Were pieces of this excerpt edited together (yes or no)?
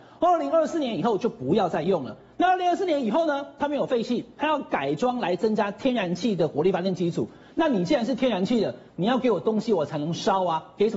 no